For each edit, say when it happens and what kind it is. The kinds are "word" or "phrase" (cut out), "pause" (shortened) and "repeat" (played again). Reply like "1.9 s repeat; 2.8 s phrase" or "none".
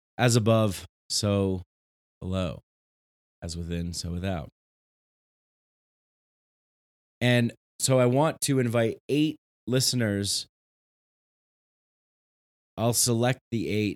none